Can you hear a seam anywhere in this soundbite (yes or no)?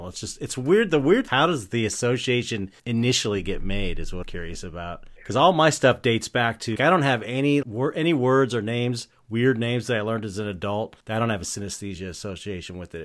yes